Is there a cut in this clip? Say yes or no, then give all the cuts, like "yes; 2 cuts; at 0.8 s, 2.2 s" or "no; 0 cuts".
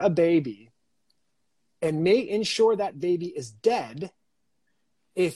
no; 0 cuts